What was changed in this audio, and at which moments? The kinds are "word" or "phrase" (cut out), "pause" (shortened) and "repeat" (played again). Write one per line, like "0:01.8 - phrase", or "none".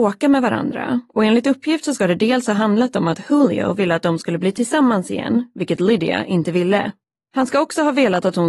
0:07.0 - pause